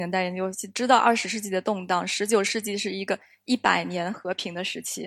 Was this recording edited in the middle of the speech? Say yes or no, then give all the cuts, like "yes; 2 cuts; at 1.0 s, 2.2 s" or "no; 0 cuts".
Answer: no; 0 cuts